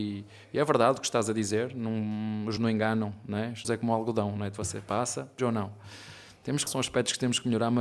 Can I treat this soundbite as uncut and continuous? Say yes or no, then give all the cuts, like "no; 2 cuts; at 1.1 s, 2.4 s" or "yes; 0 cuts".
no; 4 cuts; at 2.6 s, 3.6 s, 5.4 s, 6.7 s